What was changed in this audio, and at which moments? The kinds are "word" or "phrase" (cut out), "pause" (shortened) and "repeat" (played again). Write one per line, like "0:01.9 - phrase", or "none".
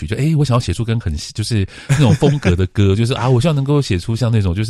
0:01.0 - word